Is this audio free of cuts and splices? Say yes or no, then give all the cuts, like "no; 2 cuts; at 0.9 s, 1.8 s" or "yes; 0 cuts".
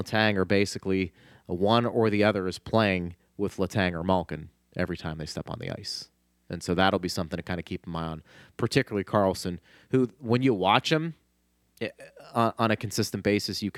yes; 0 cuts